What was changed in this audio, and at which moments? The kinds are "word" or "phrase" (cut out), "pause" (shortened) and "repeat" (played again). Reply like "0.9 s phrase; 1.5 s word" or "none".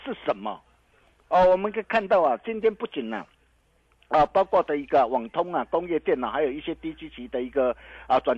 none

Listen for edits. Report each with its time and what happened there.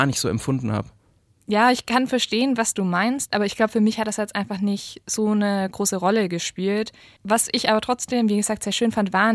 none

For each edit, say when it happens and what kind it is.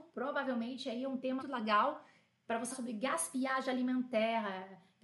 1.4 s word; 2.7 s word

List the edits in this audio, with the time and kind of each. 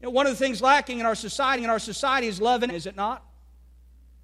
1.6 s repeat; 2.7 s word

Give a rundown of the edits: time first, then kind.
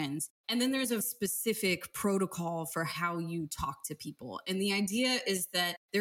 1.0 s word

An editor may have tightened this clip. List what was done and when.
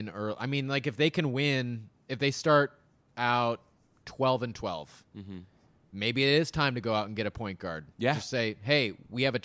3.8 s pause; 5.1 s pause; 7.9 s pause

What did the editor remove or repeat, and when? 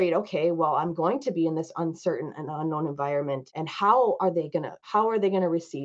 none

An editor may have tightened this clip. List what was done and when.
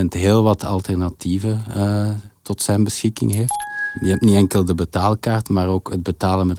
none

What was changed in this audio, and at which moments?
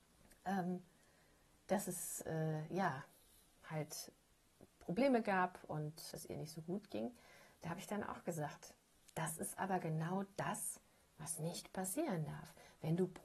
6.1 s word

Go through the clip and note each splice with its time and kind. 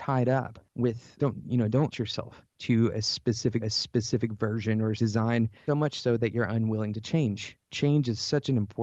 1.2 s word; 1.9 s word; 3.6 s repeat; 5.0 s word; 5.7 s word

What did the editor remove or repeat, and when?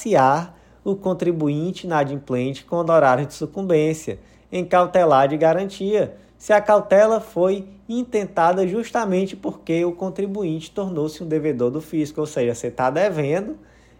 none

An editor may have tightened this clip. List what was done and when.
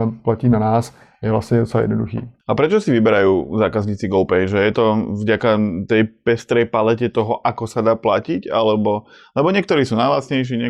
none

